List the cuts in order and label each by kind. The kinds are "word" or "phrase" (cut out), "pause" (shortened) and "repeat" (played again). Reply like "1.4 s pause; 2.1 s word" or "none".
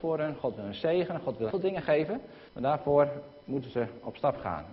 1.5 s word; 2.5 s pause; 3.4 s pause